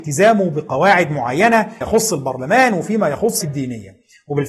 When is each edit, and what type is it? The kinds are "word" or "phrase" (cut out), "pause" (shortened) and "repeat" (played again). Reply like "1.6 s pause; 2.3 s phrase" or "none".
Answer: 1.8 s word; 3.4 s word